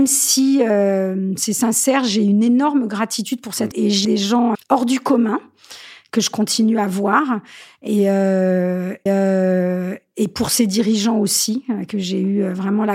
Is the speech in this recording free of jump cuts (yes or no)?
no